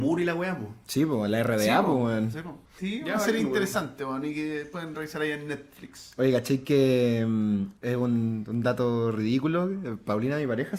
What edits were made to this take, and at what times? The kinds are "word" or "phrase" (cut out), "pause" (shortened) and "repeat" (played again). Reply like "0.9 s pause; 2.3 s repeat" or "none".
2.8 s word